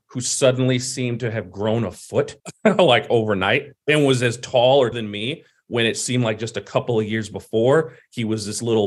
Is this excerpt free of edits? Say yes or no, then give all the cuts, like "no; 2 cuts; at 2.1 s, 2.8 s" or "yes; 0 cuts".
no; 3 cuts; at 2.4 s, 3.8 s, 4.9 s